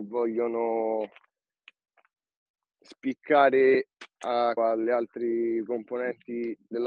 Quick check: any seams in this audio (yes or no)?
yes